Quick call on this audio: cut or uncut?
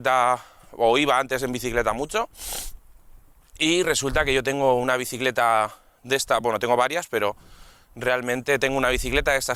uncut